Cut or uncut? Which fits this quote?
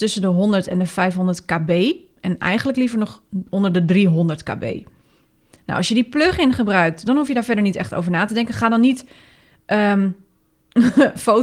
uncut